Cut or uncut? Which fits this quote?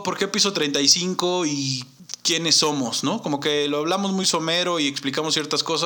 uncut